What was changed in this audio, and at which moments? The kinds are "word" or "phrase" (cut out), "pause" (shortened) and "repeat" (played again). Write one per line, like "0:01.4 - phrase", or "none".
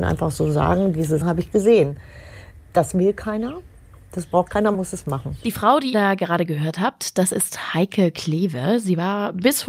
0:01.2 - word
0:04.7 - word
0:05.9 - word